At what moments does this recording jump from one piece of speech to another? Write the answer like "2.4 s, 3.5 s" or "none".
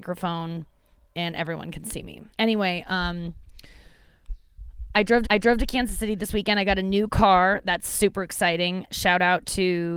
2.3 s, 5.2 s